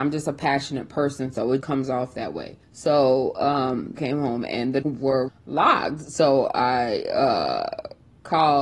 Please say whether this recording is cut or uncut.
cut